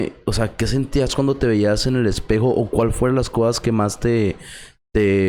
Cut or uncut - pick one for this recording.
uncut